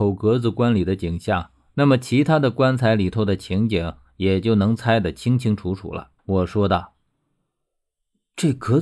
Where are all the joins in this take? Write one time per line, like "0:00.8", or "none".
0:06.2